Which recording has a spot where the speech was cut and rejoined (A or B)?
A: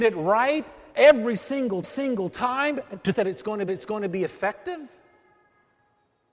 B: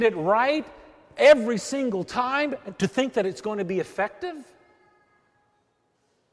A